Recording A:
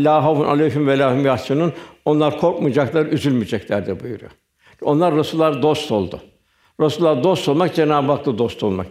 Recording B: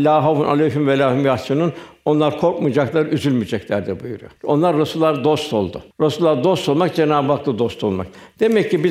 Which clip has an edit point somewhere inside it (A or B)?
B